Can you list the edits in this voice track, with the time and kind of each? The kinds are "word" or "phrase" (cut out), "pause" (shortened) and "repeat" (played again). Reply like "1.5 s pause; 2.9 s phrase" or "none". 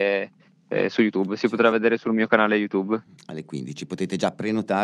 none

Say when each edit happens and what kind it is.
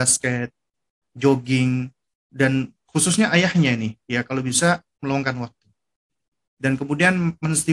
2.2 s word

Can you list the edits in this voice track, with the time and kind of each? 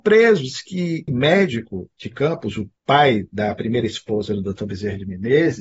1.1 s word; 2.8 s pause

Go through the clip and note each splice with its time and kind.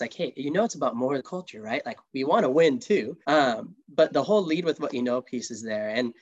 1.2 s word; 3.2 s pause

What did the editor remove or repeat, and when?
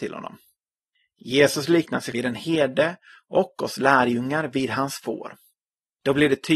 2.1 s word

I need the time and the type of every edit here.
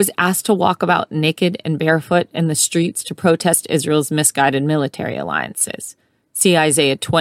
none

